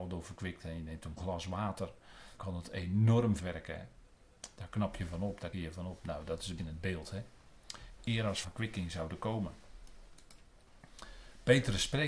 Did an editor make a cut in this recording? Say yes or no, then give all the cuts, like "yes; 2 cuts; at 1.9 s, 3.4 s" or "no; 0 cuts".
yes; 6 cuts; at 1.2 s, 2.4 s, 3.4 s, 5.5 s, 6.6 s, 8.4 s